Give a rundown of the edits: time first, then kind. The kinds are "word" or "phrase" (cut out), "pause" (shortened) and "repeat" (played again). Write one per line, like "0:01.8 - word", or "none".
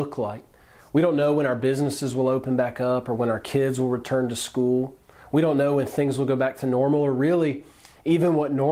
none